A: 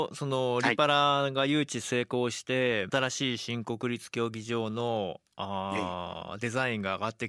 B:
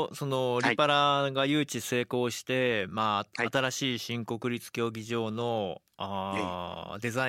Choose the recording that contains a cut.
A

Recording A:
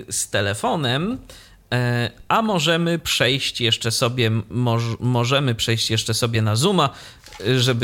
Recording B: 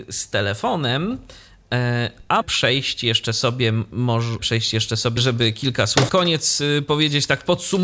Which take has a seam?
B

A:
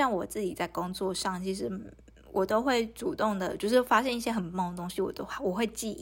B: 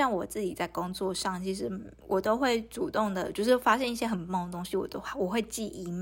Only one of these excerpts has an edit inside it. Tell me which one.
B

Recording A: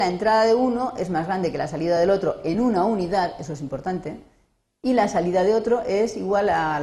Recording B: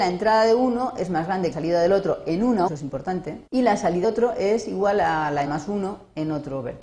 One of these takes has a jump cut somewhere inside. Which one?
B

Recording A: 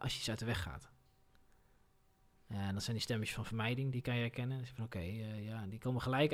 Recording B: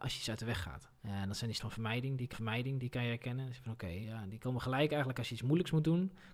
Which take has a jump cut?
B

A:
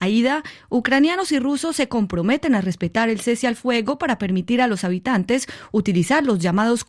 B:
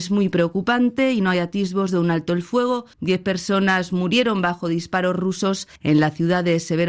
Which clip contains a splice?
B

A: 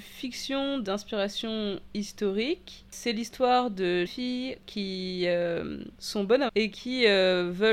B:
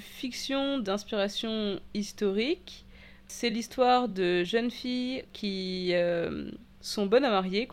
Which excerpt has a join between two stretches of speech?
A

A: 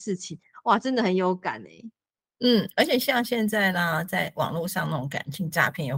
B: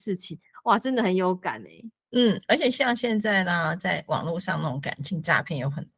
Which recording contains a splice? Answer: B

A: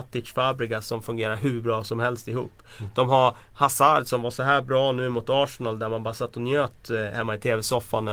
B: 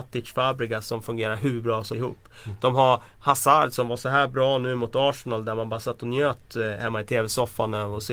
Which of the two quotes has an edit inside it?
B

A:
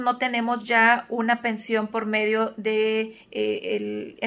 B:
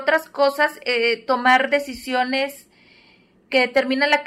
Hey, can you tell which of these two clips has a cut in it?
A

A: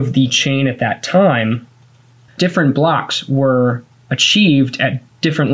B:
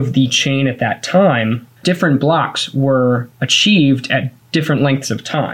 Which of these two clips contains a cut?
B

